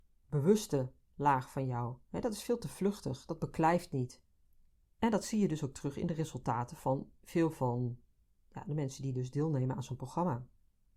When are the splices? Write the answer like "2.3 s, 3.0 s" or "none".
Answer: 4.8 s, 7.2 s